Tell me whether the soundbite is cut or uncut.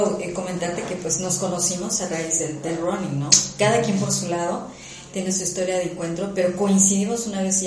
uncut